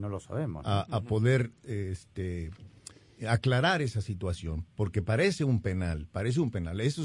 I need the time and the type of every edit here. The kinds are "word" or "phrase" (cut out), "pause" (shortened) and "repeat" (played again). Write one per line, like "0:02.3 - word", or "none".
none